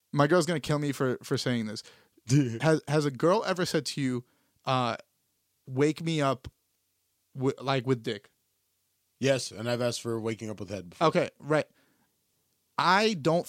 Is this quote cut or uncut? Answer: uncut